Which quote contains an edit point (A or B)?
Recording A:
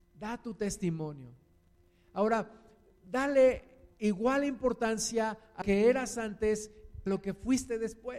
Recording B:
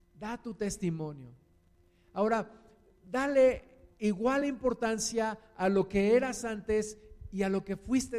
A